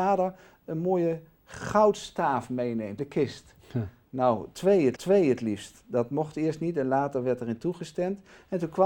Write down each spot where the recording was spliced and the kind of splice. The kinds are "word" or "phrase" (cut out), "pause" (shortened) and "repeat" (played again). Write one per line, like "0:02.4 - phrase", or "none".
0:03.0 - word
0:05.0 - repeat